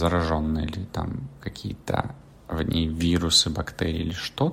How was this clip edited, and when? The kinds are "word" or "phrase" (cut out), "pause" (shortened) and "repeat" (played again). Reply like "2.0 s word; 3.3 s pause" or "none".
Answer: none